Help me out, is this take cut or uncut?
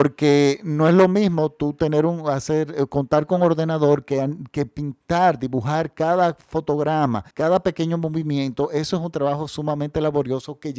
cut